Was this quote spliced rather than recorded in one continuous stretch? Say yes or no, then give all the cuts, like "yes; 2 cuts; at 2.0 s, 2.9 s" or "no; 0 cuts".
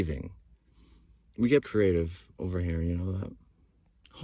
yes; 1 cut; at 1.6 s